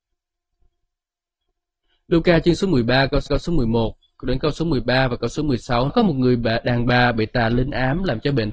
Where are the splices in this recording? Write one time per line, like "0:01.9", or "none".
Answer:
0:03.3
0:05.9